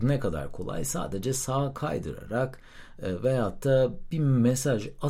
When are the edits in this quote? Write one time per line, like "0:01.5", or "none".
none